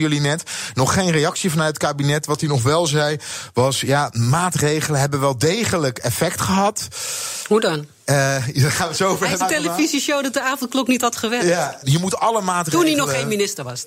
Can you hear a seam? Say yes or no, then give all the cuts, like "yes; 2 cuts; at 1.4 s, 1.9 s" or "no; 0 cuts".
yes; 2 cuts; at 9.4 s, 11.8 s